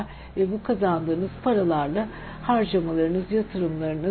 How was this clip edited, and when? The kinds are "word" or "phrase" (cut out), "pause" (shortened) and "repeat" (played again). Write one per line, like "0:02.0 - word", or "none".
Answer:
none

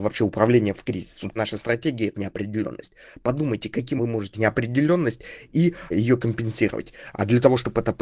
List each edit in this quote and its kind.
0:01.4 - word
0:02.1 - word
0:04.0 - word
0:04.3 - word
0:05.9 - word

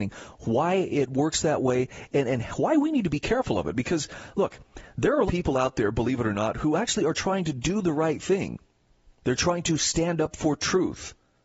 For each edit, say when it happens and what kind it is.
0:05.3 - phrase
0:08.9 - pause

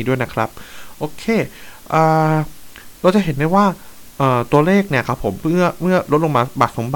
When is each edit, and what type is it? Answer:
0:02.9 - pause

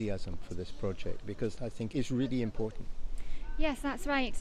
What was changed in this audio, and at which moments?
0:01.6 - word
0:01.9 - word

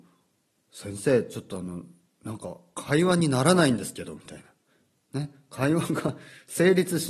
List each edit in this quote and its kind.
none

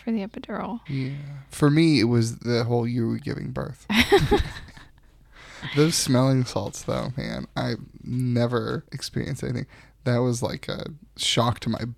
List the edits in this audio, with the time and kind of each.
none

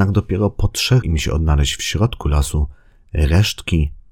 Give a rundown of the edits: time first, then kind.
0:01.0 - phrase

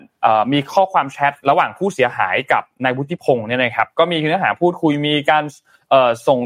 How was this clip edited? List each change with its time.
0:01.4 - pause

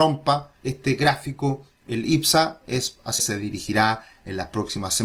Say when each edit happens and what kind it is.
0:03.2 - word

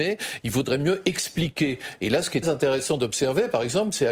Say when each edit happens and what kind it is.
0:02.4 - word

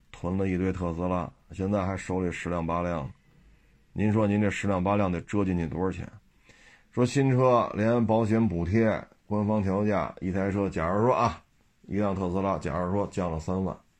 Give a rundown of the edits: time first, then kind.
none

